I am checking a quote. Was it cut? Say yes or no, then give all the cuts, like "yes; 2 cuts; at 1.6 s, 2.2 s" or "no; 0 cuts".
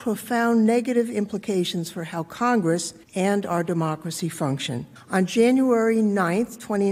yes; 2 cuts; at 3.0 s, 5.0 s